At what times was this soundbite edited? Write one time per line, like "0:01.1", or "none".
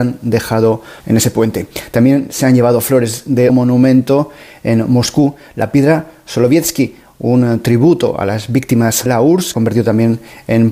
0:01.0
0:03.5
0:09.1
0:09.5